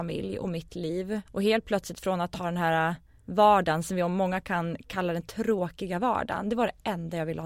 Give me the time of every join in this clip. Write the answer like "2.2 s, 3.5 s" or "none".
1.3 s